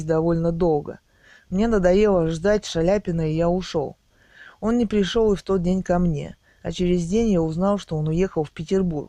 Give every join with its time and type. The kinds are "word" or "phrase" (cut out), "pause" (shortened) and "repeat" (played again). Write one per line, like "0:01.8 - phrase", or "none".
none